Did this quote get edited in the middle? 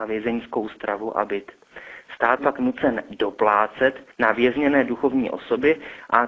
yes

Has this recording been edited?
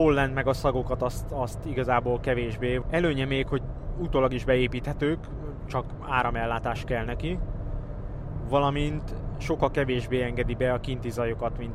no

